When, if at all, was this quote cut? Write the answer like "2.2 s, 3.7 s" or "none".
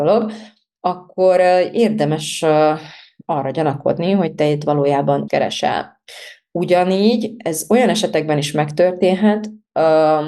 5.3 s